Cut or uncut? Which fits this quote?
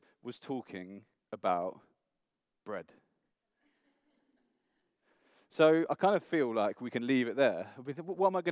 uncut